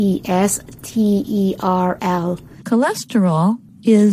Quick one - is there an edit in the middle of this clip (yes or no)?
yes